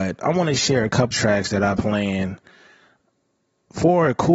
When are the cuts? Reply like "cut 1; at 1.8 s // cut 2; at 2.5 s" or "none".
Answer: cut 1; at 1.1 s // cut 2; at 1.8 s